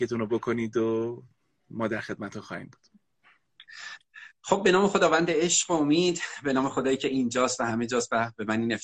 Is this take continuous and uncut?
yes; 0 cuts

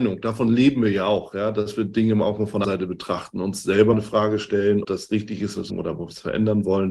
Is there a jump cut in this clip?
yes; 4 cuts; at 2.6 s, 3.9 s, 4.8 s, 5.7 s

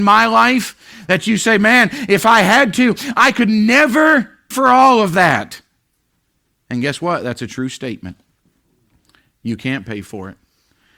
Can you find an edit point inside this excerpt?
yes; 1 cut; at 4.5 s

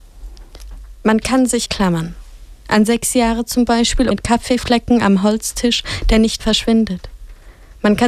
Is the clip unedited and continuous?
no; 3 cuts; at 1.7 s, 4.1 s, 6.4 s

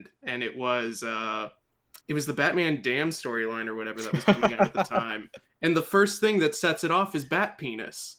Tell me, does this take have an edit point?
yes; 1 cut; at 2.0 s

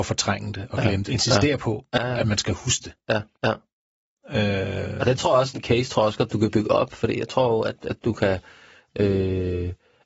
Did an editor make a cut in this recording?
yes; 3 cuts; at 1.1 s, 3.3 s, 5.5 s

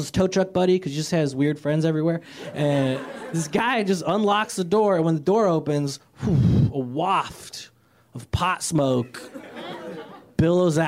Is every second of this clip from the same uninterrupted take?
yes; 0 cuts

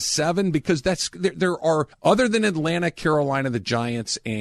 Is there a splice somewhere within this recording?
yes; 1 cut; at 1.9 s

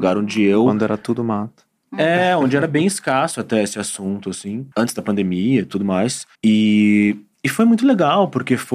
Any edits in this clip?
yes; 2 cuts; at 4.7 s, 6.3 s

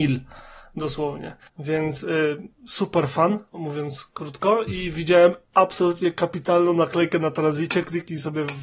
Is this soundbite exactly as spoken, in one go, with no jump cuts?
no; 2 cuts; at 1.5 s, 2.5 s

